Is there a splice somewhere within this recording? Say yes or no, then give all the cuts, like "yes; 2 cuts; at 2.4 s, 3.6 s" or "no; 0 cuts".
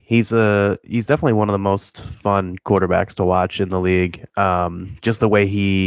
no; 0 cuts